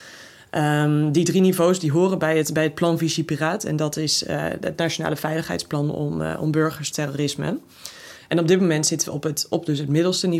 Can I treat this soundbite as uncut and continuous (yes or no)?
no